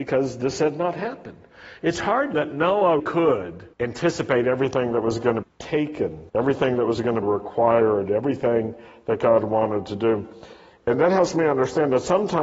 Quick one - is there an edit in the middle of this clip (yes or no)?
yes